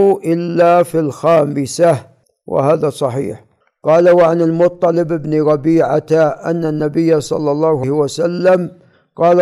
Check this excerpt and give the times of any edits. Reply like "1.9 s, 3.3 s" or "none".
7.8 s